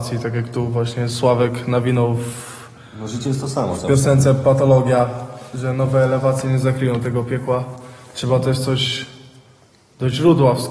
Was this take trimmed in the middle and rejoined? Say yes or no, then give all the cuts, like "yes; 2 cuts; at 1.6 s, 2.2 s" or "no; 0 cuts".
no; 0 cuts